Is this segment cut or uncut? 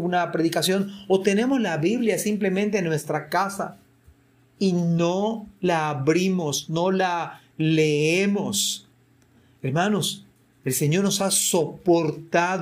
uncut